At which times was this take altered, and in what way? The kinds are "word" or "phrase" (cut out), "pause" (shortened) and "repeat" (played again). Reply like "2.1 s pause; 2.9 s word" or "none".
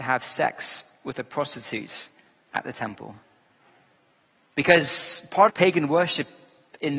5.5 s word